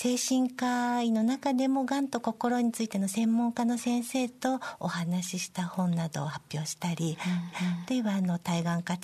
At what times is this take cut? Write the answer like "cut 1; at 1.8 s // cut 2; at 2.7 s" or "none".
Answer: cut 1; at 7.5 s